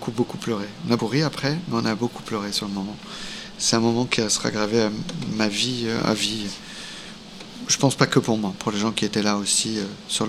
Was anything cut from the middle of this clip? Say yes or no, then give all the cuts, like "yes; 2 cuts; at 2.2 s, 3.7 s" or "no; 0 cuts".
yes; 1 cut; at 1.0 s